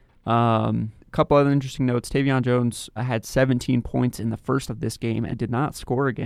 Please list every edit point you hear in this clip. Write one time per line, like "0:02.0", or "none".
0:01.0
0:03.0
0:04.7
0:05.3